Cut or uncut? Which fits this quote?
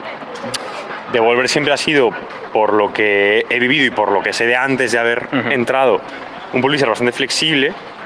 uncut